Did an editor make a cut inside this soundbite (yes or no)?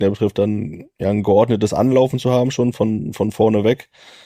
no